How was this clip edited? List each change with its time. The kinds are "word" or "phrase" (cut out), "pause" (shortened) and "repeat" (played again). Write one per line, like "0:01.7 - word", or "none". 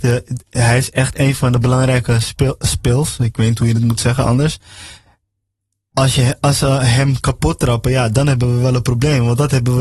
none